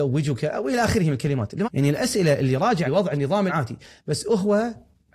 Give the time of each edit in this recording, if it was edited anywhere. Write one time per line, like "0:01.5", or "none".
0:01.6
0:02.9
0:03.5